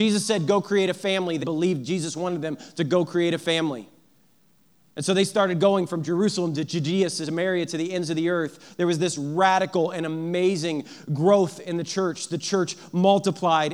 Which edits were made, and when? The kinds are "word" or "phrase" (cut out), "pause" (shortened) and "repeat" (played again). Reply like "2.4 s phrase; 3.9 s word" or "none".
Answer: 1.4 s word